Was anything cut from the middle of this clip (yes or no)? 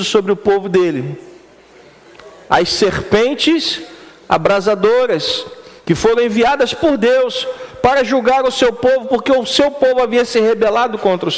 no